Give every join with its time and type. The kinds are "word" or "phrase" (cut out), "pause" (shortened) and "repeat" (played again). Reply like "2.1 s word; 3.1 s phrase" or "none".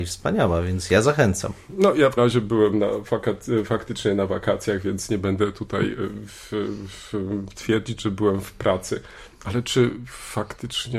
2.2 s word